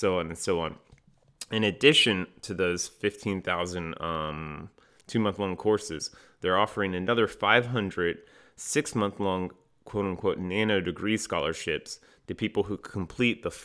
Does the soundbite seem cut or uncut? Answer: uncut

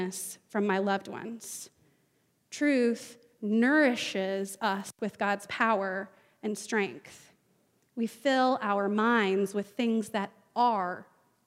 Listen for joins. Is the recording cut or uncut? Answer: uncut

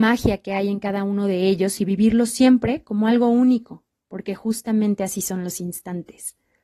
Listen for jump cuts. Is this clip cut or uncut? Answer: uncut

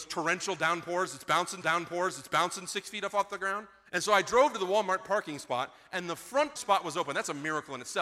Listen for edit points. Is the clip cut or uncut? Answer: cut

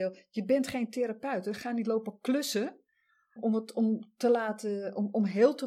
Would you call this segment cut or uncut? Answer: cut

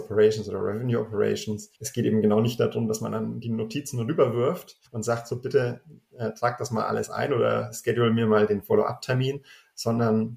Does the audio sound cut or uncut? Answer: cut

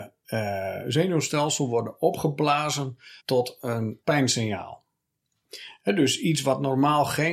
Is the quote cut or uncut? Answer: cut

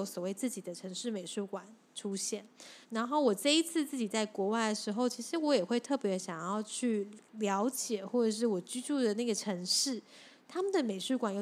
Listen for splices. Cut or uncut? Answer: cut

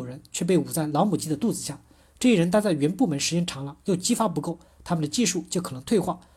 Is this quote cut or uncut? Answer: uncut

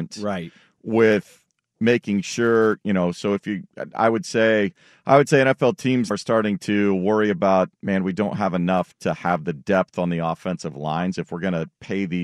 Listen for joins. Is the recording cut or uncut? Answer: cut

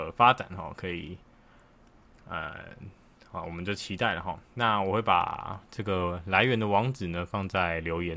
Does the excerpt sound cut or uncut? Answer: uncut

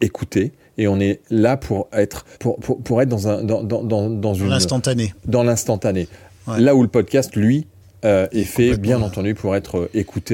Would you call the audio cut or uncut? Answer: cut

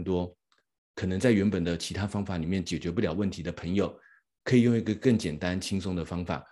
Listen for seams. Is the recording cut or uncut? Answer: uncut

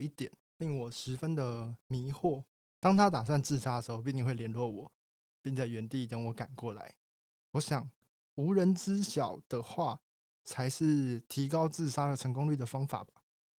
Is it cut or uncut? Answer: uncut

